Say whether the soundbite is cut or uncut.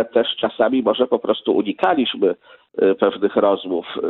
uncut